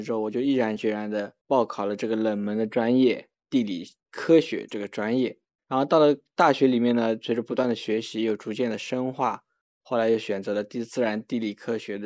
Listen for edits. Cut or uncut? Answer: uncut